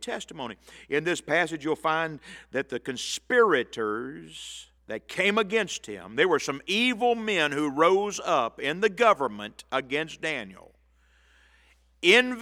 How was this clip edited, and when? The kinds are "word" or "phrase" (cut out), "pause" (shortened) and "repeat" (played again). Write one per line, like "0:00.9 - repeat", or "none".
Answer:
0:04.8 - pause